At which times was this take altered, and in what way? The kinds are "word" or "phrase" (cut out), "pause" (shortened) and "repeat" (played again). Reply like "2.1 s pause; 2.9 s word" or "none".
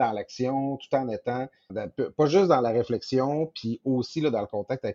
1.7 s word